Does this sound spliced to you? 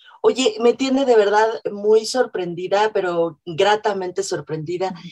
no; 0 cuts

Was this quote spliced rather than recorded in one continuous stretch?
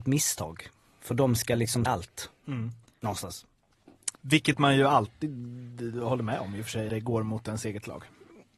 yes; 3 cuts; at 1.9 s, 4.1 s, 6.9 s

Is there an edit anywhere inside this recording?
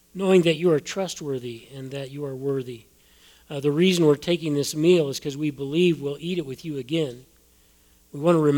no; 0 cuts

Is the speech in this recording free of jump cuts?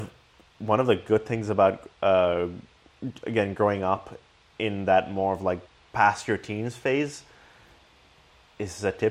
no; 2 cuts; at 1.9 s, 5.7 s

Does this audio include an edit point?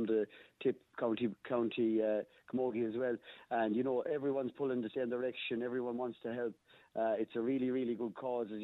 no; 0 cuts

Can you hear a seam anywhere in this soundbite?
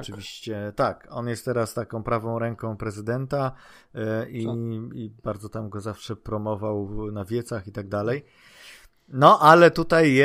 no; 0 cuts

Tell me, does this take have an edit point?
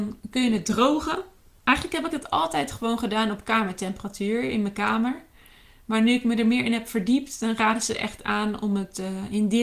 no; 0 cuts

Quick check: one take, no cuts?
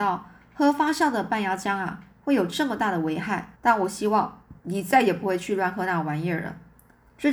no; 2 cuts; at 3.5 s, 4.6 s

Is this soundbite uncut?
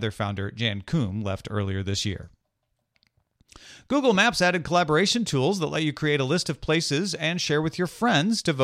yes; 0 cuts

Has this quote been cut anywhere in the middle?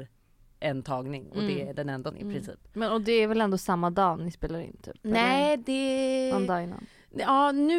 yes; 2 cuts; at 2.1 s, 5.0 s

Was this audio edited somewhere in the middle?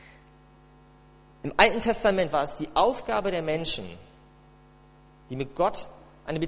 no; 0 cuts

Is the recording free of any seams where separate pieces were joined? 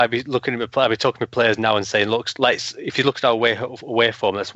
yes; 0 cuts

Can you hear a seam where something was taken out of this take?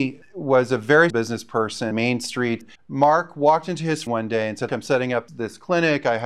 yes; 6 cuts; at 1.1 s, 1.9 s, 2.7 s, 4.1 s, 4.7 s, 5.3 s

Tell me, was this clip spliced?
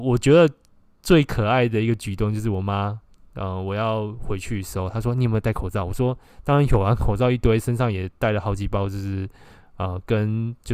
no; 0 cuts

